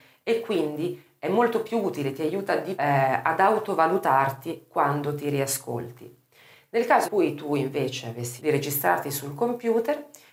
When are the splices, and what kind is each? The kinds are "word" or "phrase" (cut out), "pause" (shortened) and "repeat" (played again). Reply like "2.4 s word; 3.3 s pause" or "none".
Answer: 2.8 s word; 7.0 s word; 8.4 s word